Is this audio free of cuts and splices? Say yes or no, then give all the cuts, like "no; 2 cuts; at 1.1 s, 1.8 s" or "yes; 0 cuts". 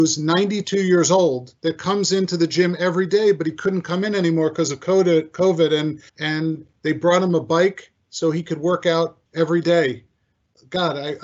no; 3 cuts; at 1.6 s, 6.1 s, 9.3 s